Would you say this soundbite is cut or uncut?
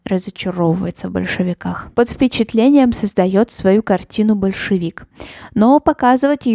cut